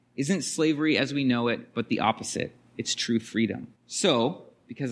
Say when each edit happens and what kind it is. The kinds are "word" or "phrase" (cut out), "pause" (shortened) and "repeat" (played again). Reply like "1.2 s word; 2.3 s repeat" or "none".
2.7 s pause; 3.8 s pause